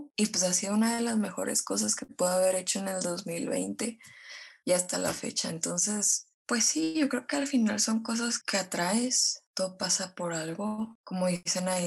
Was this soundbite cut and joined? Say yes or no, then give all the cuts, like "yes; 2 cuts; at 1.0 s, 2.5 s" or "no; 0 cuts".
no; 0 cuts